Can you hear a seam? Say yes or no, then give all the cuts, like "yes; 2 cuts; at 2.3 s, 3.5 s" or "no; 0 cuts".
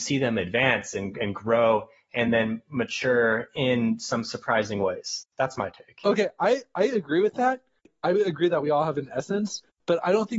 no; 0 cuts